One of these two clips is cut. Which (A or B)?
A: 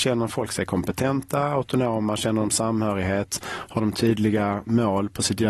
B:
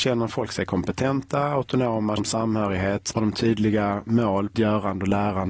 B